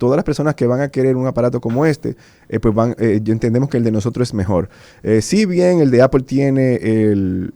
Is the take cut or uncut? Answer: uncut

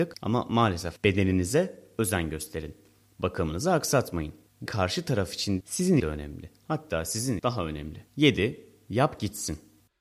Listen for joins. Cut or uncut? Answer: cut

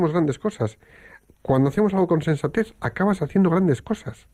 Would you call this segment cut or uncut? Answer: uncut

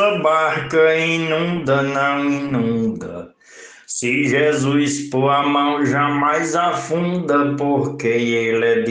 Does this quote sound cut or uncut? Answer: uncut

